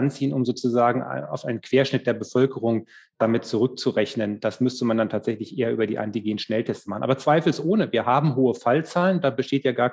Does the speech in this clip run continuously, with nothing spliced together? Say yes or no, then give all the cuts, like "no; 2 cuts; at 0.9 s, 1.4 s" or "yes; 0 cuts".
yes; 0 cuts